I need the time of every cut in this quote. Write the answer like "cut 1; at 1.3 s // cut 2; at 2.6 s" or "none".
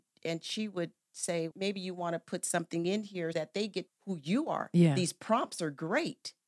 cut 1; at 1.5 s // cut 2; at 3.3 s // cut 3; at 3.9 s